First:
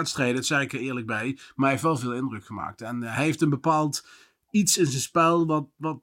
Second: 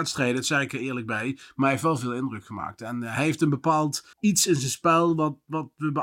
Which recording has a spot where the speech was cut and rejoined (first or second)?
second